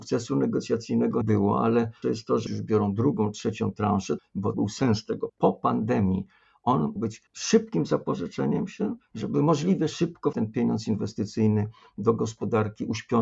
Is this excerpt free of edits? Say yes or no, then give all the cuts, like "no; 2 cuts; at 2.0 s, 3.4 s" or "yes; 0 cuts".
no; 9 cuts; at 1.2 s, 2.0 s, 2.5 s, 4.2 s, 4.5 s, 5.3 s, 7.0 s, 7.3 s, 10.3 s